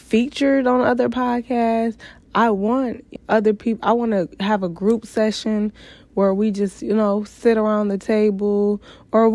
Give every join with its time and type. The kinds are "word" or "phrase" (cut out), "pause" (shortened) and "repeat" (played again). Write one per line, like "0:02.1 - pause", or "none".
0:03.2 - word